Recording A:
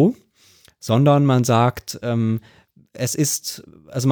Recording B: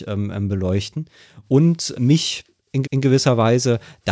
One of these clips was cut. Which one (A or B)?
B